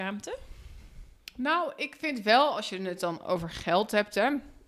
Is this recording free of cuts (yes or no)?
yes